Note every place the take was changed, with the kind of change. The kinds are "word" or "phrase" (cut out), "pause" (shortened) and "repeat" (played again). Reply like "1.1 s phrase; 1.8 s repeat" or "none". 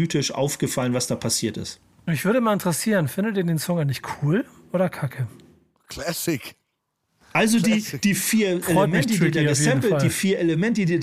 none